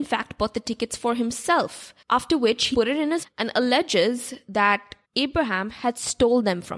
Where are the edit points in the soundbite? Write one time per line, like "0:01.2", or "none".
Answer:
0:02.0
0:02.7
0:03.2
0:05.0